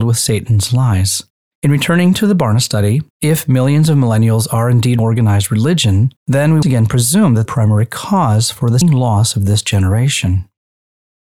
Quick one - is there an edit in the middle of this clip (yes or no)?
yes